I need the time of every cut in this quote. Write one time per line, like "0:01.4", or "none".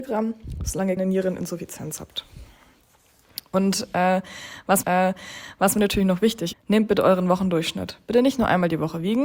0:01.0
0:04.8
0:06.5